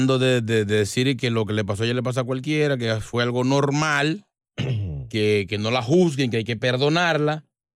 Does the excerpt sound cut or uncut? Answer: uncut